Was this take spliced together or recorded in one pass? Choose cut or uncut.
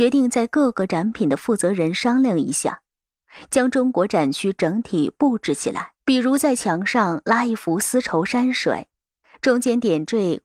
cut